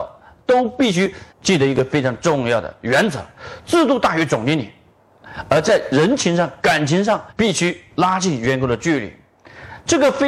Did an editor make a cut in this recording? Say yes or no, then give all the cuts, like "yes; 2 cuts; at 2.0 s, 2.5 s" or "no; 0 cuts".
yes; 2 cuts; at 1.3 s, 7.3 s